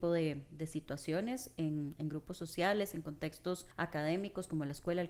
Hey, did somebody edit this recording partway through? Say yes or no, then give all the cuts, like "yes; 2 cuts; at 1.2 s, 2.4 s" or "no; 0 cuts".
yes; 1 cut; at 3.7 s